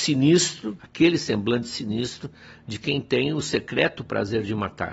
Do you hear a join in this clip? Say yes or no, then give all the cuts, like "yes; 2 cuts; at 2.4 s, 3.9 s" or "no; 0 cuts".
no; 0 cuts